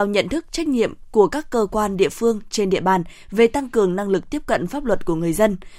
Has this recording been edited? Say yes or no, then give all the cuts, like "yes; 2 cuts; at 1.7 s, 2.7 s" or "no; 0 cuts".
no; 0 cuts